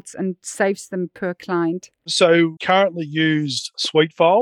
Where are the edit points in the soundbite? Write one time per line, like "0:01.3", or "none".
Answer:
0:02.6